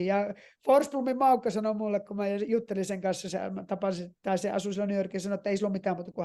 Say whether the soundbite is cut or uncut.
uncut